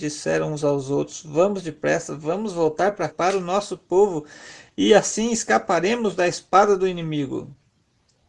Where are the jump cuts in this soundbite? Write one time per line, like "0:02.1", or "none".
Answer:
0:03.1